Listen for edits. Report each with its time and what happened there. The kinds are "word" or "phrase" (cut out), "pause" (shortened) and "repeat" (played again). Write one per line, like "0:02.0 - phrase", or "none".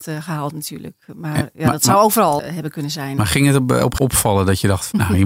0:02.4 - word
0:04.0 - word